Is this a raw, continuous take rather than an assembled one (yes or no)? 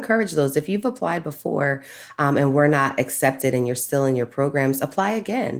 yes